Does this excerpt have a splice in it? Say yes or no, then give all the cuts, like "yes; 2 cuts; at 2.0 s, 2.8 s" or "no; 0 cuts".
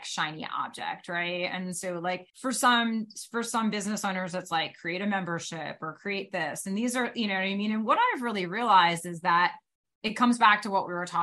yes; 1 cut; at 2.3 s